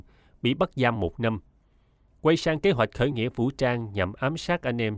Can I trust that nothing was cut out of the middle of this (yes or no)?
yes